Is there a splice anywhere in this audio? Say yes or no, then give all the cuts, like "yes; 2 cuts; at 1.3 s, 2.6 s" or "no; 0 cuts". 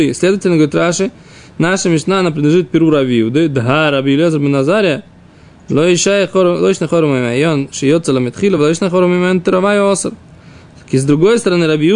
no; 0 cuts